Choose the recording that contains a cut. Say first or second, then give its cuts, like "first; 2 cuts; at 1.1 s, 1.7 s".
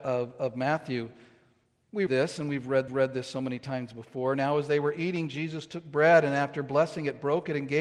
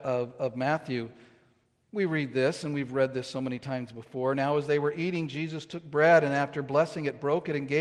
first; 2 cuts; at 2.1 s, 2.9 s